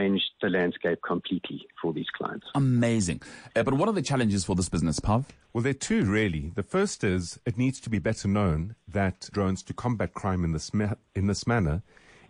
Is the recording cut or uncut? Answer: cut